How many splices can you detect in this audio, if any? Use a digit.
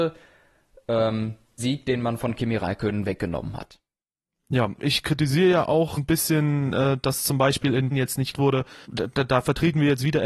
6